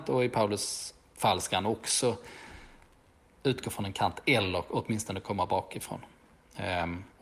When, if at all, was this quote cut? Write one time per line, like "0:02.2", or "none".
none